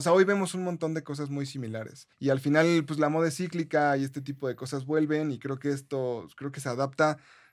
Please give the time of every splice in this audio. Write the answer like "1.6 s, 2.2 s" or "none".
2.1 s